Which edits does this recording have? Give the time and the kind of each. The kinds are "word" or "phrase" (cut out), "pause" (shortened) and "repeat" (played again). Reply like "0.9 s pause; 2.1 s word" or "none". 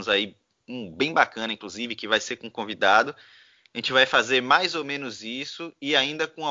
none